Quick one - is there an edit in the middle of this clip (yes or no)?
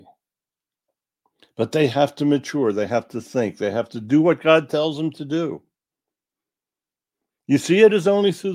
no